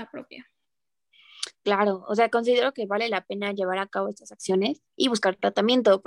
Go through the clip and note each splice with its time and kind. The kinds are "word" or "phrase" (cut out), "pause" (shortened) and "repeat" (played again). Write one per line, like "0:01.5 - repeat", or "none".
0:04.9 - pause